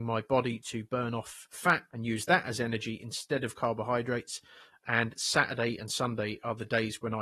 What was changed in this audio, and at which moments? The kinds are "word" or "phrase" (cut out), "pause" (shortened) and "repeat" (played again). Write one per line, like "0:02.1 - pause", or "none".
none

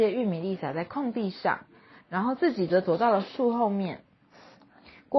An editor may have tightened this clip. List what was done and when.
none

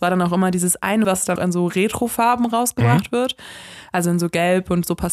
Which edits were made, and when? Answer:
0:01.0 - word
0:01.4 - word

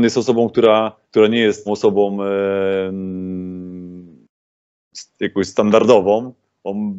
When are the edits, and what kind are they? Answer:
0:01.0 - pause
0:01.7 - word

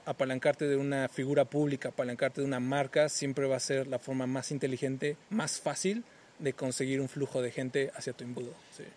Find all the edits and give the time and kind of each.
0:05.2 - pause

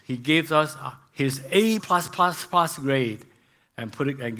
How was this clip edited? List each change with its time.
0:01.8 - word

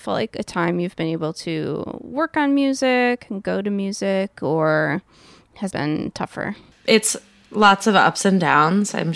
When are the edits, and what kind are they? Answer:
0:05.7 - word

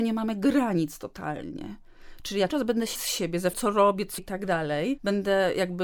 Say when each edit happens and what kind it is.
0:02.5 - word
0:02.9 - word
0:03.5 - word
0:04.2 - word

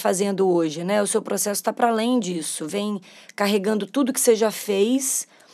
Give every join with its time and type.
none

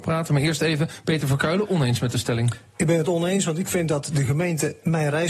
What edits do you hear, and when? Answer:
none

